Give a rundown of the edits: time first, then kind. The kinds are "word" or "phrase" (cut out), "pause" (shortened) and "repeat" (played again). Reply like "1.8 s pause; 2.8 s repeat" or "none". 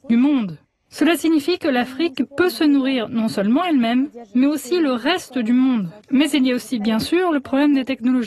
6.0 s pause